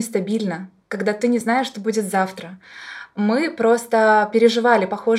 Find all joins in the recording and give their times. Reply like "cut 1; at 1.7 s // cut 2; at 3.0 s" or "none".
none